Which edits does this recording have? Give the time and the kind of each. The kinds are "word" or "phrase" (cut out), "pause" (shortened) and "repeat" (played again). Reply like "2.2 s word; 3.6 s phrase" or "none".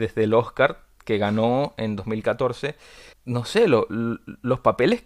3.1 s word